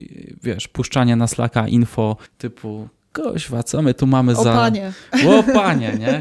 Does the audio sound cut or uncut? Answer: cut